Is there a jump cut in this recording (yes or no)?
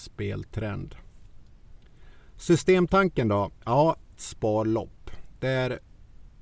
yes